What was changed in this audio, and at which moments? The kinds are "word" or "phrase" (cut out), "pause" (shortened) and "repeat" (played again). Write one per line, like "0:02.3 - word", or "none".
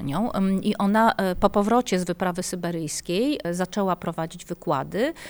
none

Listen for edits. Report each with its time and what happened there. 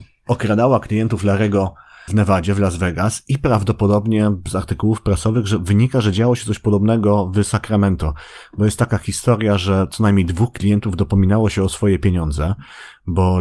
0:02.1 - word

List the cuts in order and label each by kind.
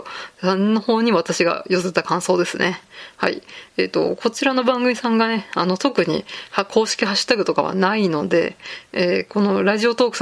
none

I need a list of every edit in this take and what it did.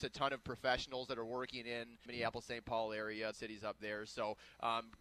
0:02.1 - word
0:03.3 - phrase

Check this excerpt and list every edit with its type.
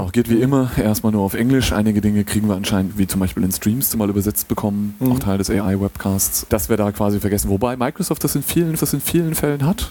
0:02.9 - word
0:03.9 - phrase
0:05.2 - phrase
0:06.5 - word
0:08.8 - repeat

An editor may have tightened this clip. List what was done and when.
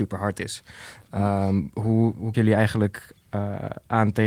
0:02.3 - word

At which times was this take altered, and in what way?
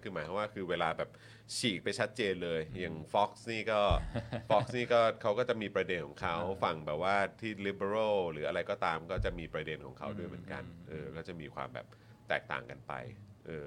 none

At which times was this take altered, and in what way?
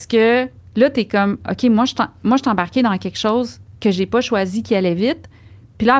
none

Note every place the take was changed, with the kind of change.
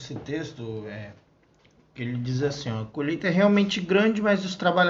none

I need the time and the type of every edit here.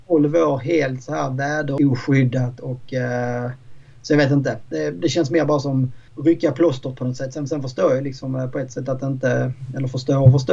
0:06.1 - pause

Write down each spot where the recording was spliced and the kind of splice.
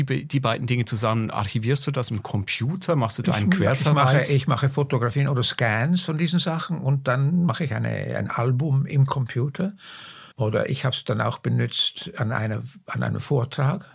0:10.3 - pause

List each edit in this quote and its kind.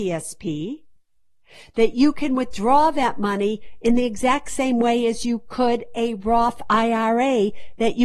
none

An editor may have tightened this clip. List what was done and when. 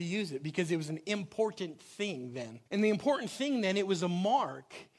0:02.7 - pause

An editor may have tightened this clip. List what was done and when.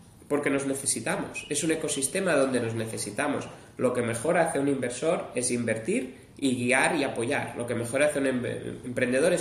none

